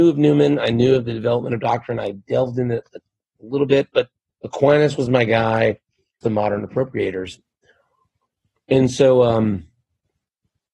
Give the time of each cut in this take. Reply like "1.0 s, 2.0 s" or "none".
4.3 s, 6.2 s